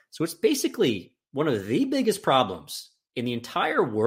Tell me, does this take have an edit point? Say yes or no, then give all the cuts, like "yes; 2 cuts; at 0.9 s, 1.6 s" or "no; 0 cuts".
no; 0 cuts